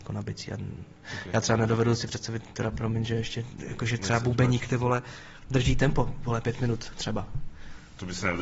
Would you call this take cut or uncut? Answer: uncut